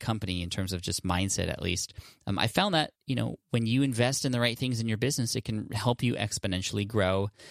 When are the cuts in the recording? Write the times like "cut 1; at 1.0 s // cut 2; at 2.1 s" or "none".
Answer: cut 1; at 3.0 s